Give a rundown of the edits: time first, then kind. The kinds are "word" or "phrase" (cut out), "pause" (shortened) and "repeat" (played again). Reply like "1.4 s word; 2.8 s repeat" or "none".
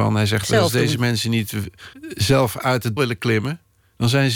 1.9 s pause; 3.0 s word